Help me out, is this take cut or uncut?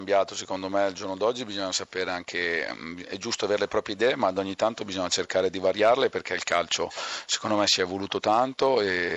uncut